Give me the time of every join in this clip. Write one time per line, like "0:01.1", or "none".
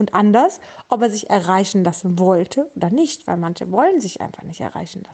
none